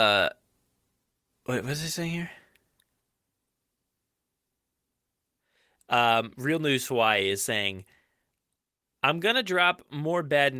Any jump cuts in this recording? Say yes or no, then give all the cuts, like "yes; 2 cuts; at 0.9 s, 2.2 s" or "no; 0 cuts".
no; 0 cuts